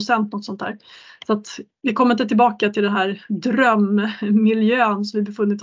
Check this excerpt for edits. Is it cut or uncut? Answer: uncut